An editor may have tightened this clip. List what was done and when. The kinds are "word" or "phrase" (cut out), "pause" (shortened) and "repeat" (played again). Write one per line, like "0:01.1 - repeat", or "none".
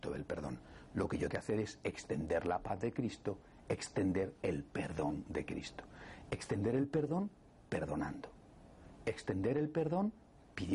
0:01.3 - word